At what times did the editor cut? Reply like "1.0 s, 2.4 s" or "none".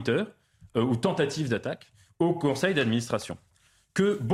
none